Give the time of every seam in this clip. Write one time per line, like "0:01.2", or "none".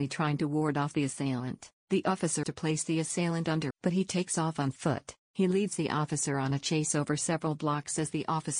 0:01.8
0:02.4
0:03.7
0:05.2